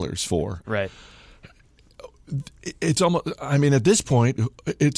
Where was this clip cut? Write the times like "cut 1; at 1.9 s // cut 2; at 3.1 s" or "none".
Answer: none